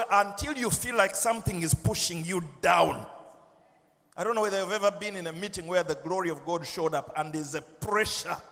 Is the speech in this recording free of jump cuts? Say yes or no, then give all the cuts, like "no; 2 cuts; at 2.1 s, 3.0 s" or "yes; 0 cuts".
yes; 0 cuts